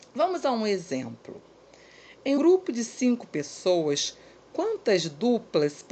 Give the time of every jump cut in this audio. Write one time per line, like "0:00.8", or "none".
0:02.4